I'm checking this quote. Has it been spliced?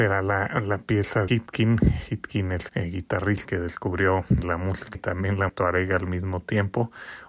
yes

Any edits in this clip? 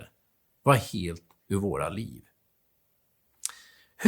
yes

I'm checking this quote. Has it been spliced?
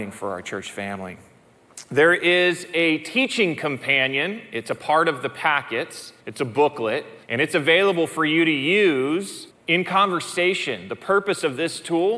yes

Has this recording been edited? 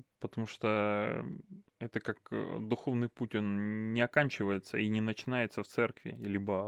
yes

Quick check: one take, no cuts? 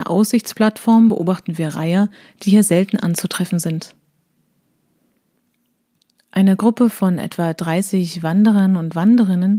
yes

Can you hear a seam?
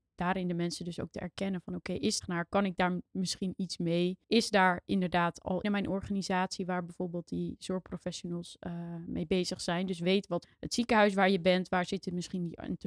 yes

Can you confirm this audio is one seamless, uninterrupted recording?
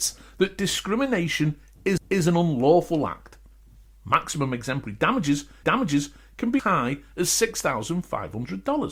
no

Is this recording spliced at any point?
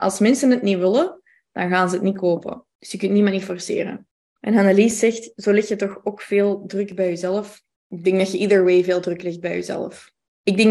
no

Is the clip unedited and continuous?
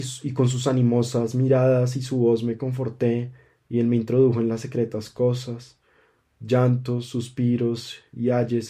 yes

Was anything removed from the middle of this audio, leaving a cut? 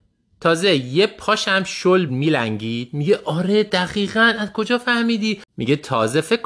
yes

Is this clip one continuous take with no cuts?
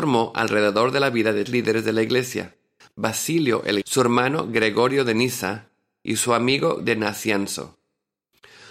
no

